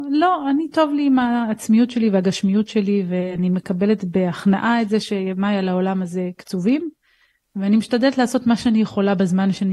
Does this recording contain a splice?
no; 0 cuts

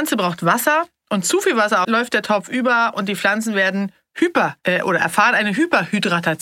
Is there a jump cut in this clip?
yes; 1 cut; at 1.8 s

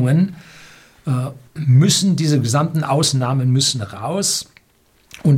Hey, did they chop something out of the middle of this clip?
yes; 1 cut; at 1.5 s

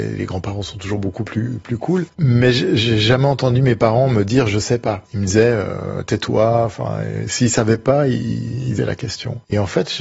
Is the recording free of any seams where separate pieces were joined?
no; 1 cut; at 8.8 s

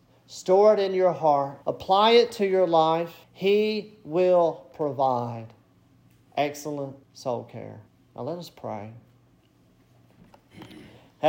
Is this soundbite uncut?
no; 4 cuts; at 1.6 s, 3.2 s, 7.0 s, 7.9 s

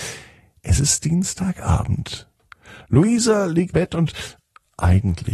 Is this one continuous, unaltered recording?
no; 1 cut; at 3.7 s

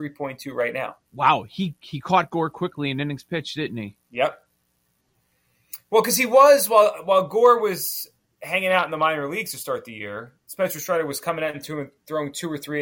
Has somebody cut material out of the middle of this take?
yes; 4 cuts; at 1.1 s, 4.0 s, 8.3 s, 10.4 s

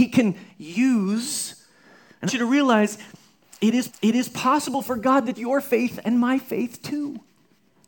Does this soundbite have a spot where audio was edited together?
yes; 3 cuts; at 2.3 s, 3.9 s, 5.3 s

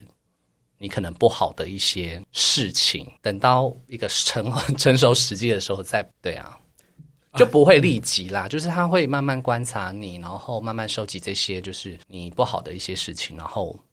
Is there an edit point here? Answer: yes; 3 cuts; at 3.2 s, 6.1 s, 12.0 s

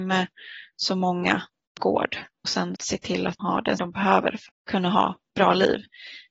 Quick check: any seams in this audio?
yes; 6 cuts; at 1.8 s, 2.4 s, 2.8 s, 3.4 s, 3.8 s, 4.5 s

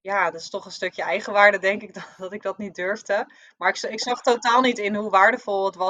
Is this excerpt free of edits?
yes; 0 cuts

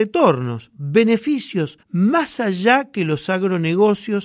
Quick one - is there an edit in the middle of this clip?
yes; 1 cut; at 1.8 s

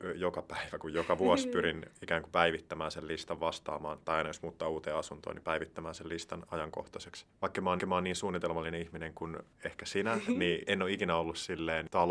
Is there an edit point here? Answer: yes; 2 cuts; at 7.8 s, 9.5 s

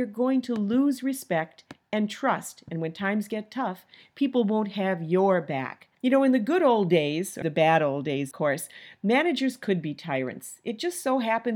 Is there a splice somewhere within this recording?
yes; 3 cuts; at 5.9 s, 7.4 s, 8.3 s

